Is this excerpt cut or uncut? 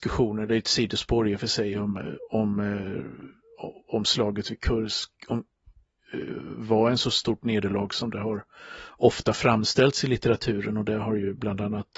uncut